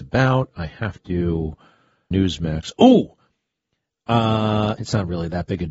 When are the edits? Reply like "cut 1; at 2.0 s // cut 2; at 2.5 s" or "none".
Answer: cut 1; at 2.1 s // cut 2; at 4.8 s

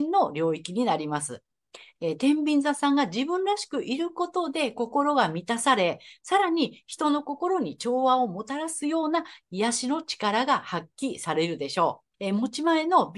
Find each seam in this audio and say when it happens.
cut 1; at 12.1 s

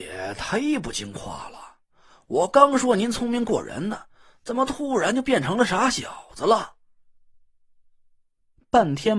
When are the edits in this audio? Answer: none

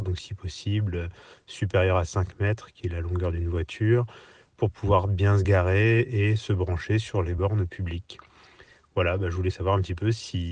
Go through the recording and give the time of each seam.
none

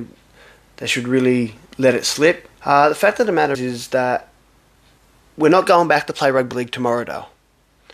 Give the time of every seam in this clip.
cut 1; at 1.7 s // cut 2; at 2.5 s // cut 3; at 3.5 s

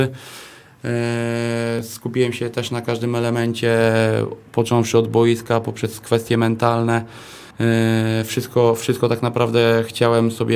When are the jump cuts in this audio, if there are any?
cut 1; at 7.5 s

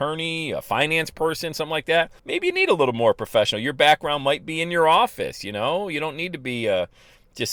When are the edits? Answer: cut 1; at 2.2 s

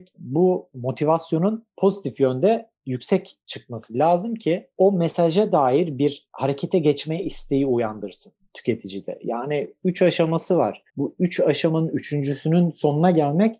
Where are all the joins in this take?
cut 1; at 10.9 s

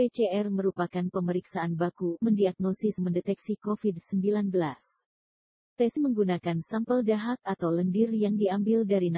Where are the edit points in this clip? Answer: cut 1; at 2.2 s // cut 2; at 3.0 s // cut 3; at 6.0 s

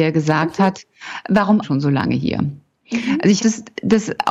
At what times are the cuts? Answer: cut 1; at 1.6 s // cut 2; at 3.4 s

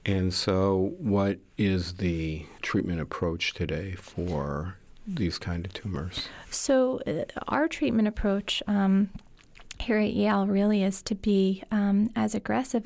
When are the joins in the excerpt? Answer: cut 1; at 2.6 s

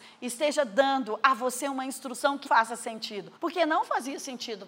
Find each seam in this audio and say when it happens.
cut 1; at 2.5 s // cut 2; at 3.4 s

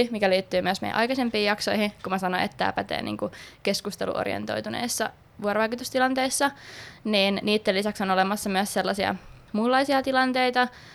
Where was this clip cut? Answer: none

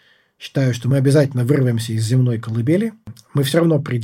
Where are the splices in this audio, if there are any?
none

